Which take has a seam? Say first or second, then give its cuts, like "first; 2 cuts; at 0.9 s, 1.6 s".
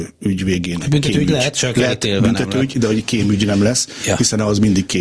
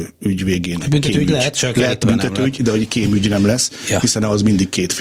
second; 1 cut; at 2.0 s